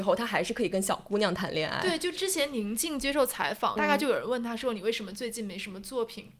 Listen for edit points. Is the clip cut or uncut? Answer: cut